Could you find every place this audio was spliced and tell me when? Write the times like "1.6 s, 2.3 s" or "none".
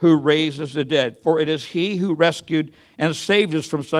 none